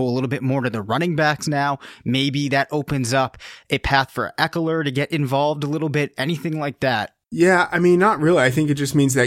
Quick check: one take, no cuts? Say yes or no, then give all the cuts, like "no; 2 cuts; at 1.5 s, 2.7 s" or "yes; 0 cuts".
no; 1 cut; at 7.2 s